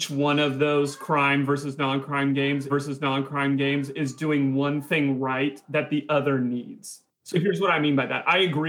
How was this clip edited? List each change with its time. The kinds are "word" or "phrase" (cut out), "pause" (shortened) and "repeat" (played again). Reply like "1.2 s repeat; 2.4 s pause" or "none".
2.7 s repeat